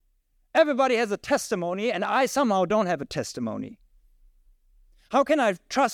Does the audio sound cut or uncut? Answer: uncut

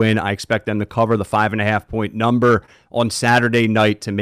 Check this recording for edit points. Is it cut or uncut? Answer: uncut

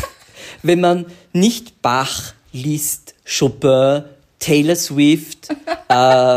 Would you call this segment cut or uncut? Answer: uncut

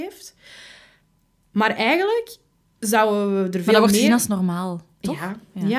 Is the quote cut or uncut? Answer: uncut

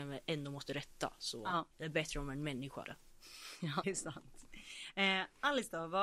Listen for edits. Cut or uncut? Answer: cut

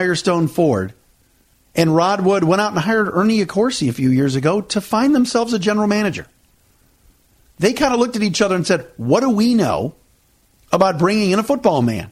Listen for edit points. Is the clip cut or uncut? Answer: uncut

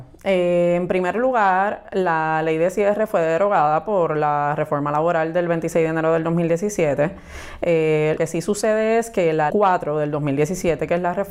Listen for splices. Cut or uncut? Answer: cut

